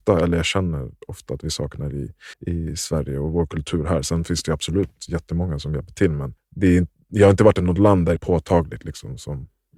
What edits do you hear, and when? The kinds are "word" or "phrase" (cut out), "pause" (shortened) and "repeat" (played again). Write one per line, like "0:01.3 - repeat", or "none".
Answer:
0:02.3 - pause
0:06.4 - pause
0:08.2 - phrase

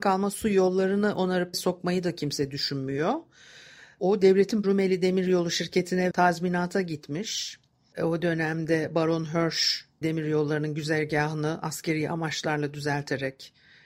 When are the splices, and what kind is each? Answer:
0:01.5 - word
0:04.6 - word
0:06.1 - word
0:10.0 - word

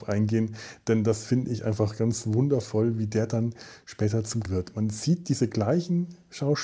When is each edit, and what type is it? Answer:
0:04.4 - word

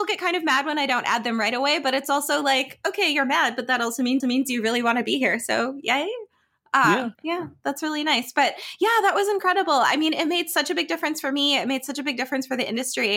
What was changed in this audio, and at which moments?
0:04.2 - repeat
0:07.1 - pause

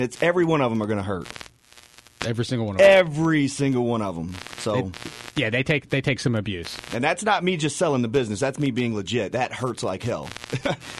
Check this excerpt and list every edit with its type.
none

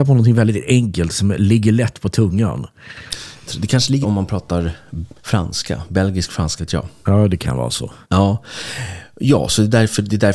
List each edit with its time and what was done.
0:04.0 - word
0:05.2 - pause
0:06.6 - word
0:08.0 - pause

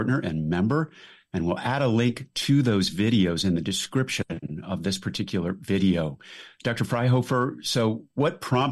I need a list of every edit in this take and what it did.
none

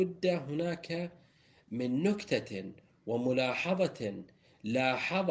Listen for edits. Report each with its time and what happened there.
none

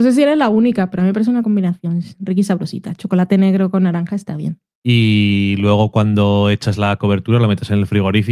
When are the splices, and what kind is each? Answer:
none

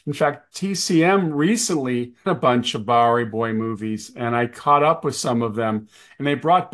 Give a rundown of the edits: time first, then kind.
0:02.3 - word

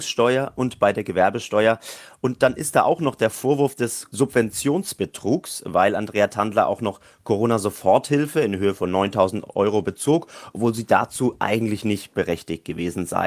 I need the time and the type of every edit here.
none

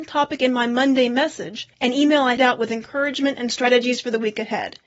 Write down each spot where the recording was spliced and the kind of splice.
0:01.7 - pause
0:02.4 - word

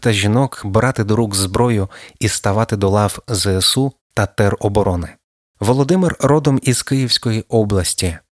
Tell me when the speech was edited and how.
none

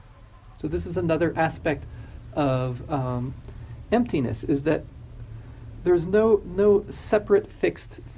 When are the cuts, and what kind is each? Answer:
0:02.3 - word

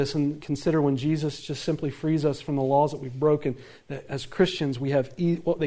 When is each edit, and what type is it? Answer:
none

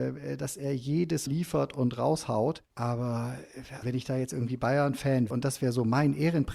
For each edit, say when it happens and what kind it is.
0:01.3 - word
0:03.8 - word
0:05.3 - word

